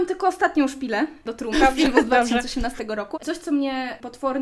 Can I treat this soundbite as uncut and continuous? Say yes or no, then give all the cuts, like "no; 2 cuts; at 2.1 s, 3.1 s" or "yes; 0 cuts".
no; 2 cuts; at 1.5 s, 3.1 s